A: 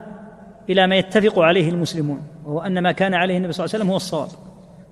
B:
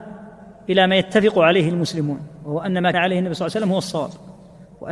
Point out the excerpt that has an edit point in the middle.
B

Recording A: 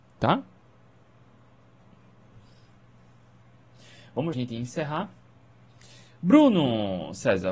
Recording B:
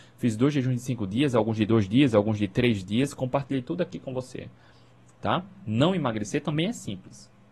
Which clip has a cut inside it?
A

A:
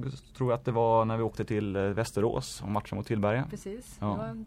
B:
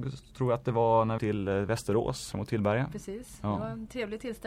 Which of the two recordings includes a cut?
B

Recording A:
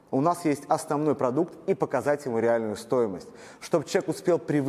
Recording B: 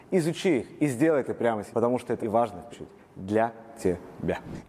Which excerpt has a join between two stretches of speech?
B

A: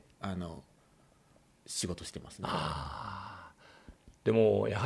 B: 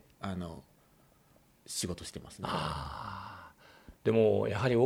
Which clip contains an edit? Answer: B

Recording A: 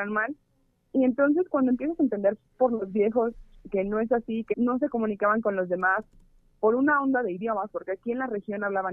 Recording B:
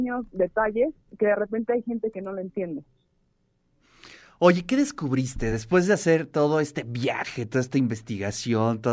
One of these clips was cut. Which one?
A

